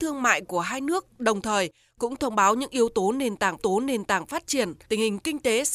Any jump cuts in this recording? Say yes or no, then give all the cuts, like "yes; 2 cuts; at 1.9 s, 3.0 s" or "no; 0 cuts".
yes; 2 cuts; at 3.6 s, 4.8 s